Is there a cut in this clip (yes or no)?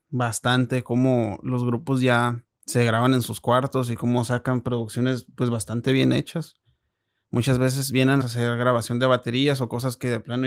yes